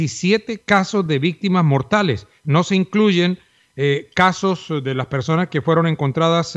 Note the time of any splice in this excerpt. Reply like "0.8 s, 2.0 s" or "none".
none